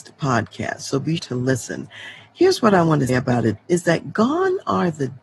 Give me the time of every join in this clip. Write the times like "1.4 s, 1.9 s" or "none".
1.2 s, 3.1 s, 3.6 s